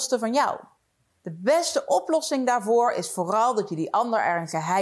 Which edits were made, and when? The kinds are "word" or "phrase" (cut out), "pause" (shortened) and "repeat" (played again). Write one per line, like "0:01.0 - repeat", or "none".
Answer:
none

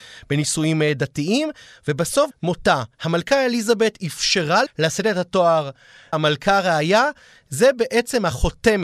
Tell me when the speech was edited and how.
0:02.3 - phrase
0:02.9 - pause
0:04.7 - word
0:06.1 - word

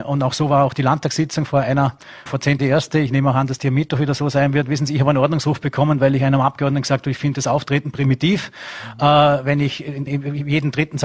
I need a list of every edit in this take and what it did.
0:01.5 - word
0:02.3 - word
0:02.6 - word
0:10.1 - word

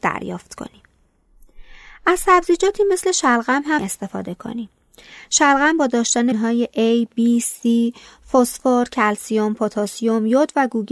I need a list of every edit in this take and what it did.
0:03.8 - word
0:06.3 - word

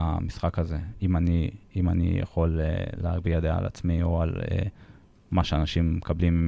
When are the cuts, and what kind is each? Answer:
none

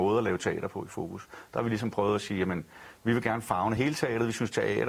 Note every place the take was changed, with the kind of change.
none

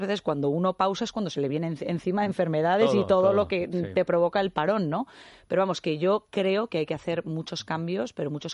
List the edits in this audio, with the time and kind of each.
none

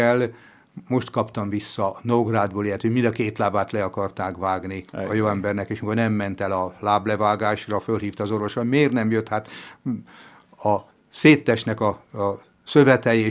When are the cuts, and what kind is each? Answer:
0:04.9 - pause
0:10.9 - pause

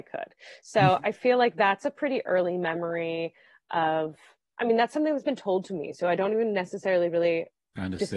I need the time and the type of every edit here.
none

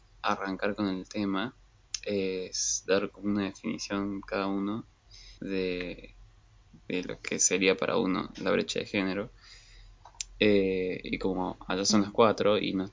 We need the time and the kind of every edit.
0:05.4 - pause

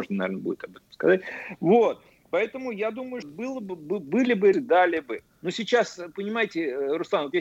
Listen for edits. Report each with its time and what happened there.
0:03.2 - word
0:04.5 - word

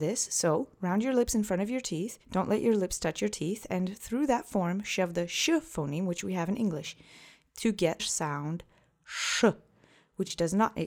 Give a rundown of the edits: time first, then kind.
0:02.2 - pause
0:08.0 - word

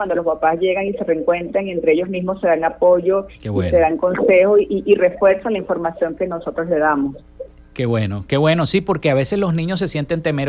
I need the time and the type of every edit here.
none

